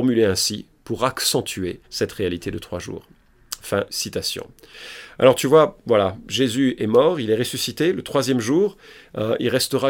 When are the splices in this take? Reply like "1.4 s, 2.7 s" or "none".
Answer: 1.8 s, 3.9 s